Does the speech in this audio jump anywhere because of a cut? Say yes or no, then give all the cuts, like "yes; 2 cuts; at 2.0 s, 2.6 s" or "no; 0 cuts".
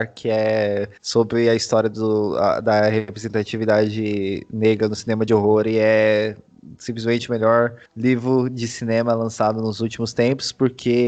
yes; 2 cuts; at 1.0 s, 7.8 s